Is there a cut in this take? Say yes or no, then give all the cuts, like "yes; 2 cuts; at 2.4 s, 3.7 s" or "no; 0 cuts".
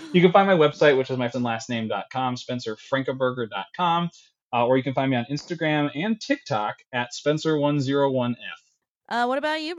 yes; 1 cut; at 1.3 s